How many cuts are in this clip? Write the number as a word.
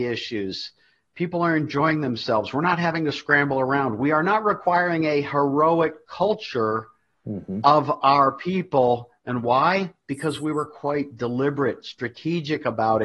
zero